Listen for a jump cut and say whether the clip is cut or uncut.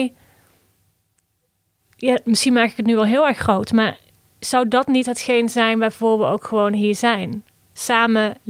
uncut